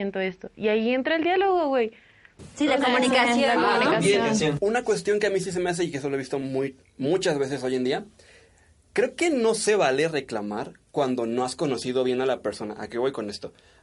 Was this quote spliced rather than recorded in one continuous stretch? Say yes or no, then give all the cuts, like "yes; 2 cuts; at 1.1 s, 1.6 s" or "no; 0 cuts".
no; 0 cuts